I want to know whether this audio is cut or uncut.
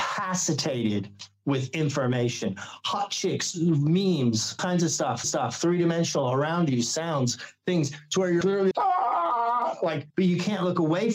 cut